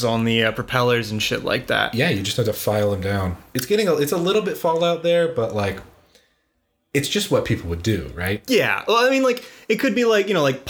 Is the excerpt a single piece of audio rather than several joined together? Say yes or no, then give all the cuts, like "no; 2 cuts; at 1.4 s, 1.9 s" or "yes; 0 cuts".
yes; 0 cuts